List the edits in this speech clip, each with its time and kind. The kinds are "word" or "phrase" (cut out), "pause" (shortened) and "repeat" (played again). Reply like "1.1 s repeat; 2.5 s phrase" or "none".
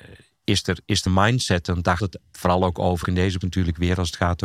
1.1 s word; 2.0 s word; 3.0 s word; 3.4 s word